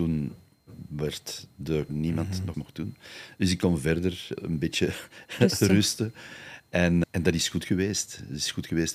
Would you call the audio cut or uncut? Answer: cut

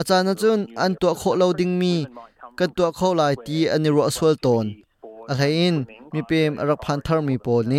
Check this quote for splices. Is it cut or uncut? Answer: cut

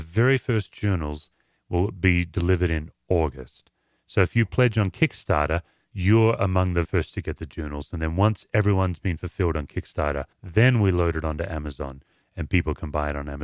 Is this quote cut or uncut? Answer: cut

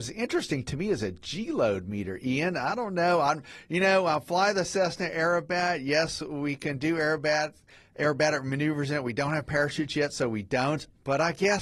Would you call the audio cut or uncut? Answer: uncut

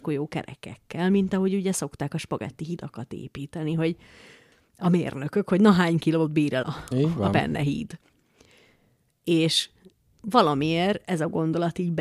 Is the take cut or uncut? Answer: cut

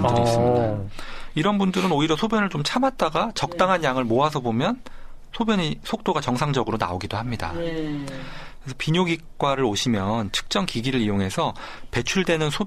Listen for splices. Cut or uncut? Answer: uncut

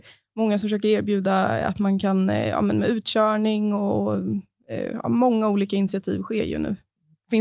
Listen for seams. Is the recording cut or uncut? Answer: uncut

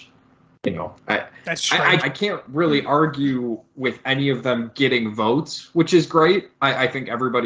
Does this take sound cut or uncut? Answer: cut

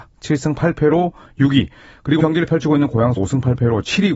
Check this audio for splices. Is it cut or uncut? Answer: cut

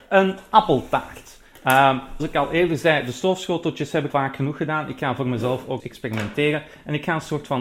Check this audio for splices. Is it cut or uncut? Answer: cut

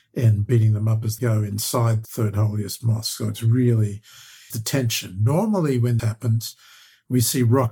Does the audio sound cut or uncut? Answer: cut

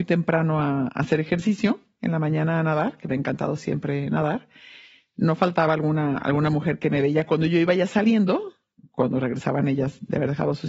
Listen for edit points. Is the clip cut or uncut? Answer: uncut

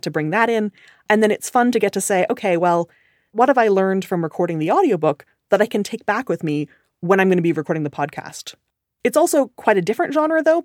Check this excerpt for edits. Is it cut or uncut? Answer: uncut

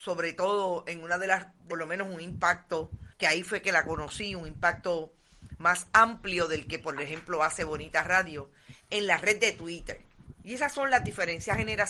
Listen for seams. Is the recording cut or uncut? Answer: cut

